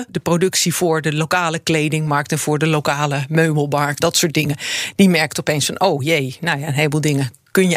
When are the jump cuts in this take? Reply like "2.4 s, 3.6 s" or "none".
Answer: 4.0 s